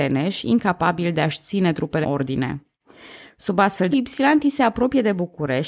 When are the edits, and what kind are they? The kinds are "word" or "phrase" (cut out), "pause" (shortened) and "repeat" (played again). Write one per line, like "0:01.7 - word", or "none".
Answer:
0:02.0 - word
0:03.9 - word

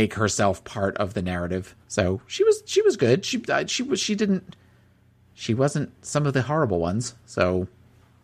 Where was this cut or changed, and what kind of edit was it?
0:01.8 - pause

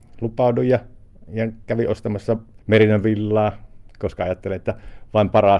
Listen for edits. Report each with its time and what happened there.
0:02.6 - pause

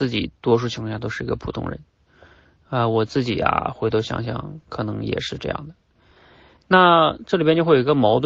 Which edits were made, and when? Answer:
none

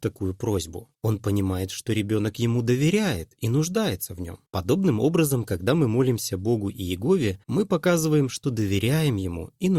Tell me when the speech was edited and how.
0:00.9 - pause
0:04.5 - pause
0:07.4 - pause

